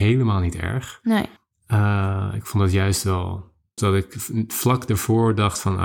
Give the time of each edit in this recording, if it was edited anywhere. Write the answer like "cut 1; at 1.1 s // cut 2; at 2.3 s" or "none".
cut 1; at 1.4 s // cut 2; at 3.8 s